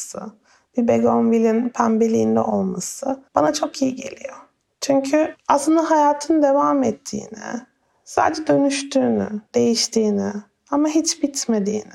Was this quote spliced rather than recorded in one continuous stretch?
yes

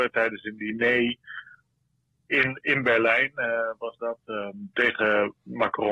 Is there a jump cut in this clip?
no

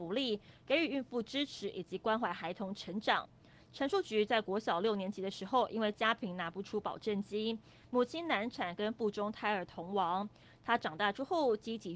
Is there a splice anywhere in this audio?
no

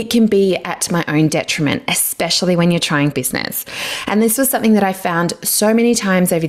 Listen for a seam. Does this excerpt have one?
yes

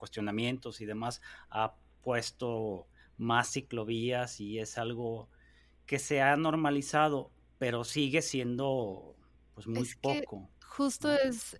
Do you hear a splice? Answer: no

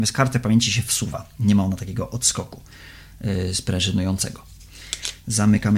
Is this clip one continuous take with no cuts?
yes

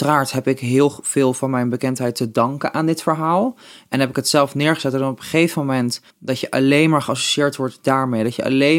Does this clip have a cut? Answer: yes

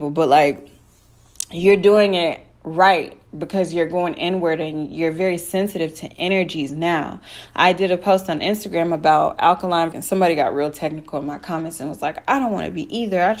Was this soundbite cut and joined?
yes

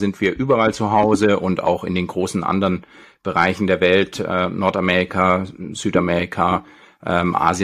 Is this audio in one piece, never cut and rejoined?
yes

